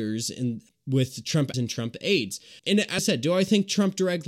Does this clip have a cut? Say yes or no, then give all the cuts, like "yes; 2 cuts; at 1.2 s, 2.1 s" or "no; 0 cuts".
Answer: yes; 3 cuts; at 1.5 s, 2.6 s, 3.0 s